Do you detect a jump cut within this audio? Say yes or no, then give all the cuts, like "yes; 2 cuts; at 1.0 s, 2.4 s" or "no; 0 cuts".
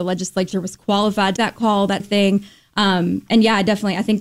yes; 2 cuts; at 1.4 s, 2.0 s